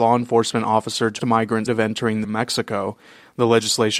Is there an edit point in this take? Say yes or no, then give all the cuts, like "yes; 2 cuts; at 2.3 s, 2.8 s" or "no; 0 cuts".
yes; 3 cuts; at 1.2 s, 1.7 s, 2.2 s